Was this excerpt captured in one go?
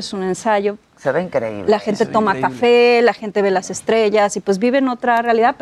yes; 0 cuts

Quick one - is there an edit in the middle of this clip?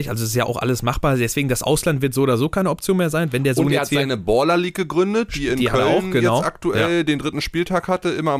no; 0 cuts

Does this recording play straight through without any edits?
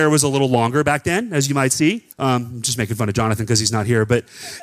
no; 1 cut; at 2.1 s

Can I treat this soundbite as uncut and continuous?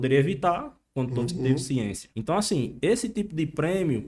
no; 1 cut; at 2.1 s

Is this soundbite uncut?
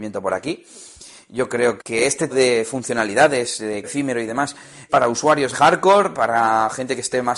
no; 5 cuts; at 1.8 s, 2.3 s, 3.8 s, 4.9 s, 5.5 s

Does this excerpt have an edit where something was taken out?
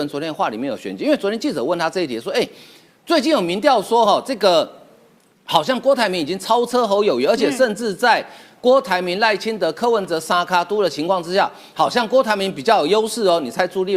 no; 0 cuts

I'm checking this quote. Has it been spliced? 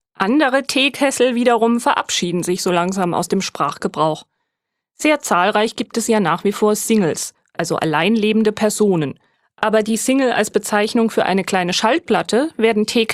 no; 0 cuts

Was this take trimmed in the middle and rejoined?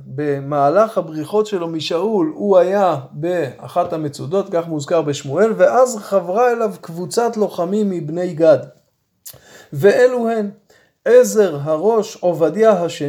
no; 0 cuts

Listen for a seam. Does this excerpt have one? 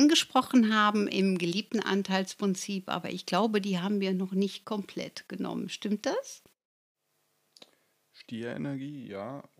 no; 0 cuts

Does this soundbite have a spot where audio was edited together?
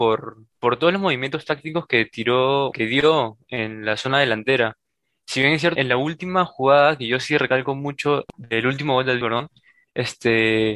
yes; 3 cuts; at 2.7 s, 5.8 s, 9.2 s

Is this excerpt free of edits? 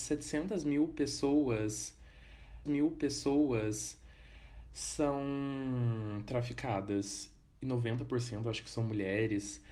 no; 1 cut; at 2.7 s

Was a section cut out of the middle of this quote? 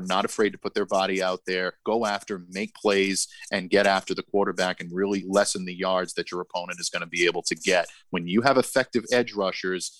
yes; 1 cut; at 1.8 s

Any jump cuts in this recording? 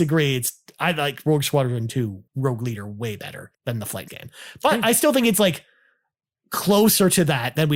yes; 3 cuts; at 2.3 s, 3.5 s, 4.1 s

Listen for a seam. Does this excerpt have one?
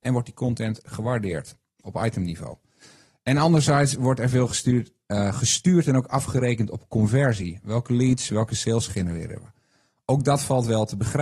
no; 0 cuts

